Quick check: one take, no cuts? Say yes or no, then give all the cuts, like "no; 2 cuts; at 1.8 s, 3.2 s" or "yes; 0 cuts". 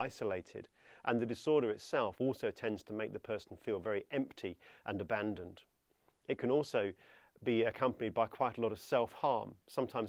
yes; 0 cuts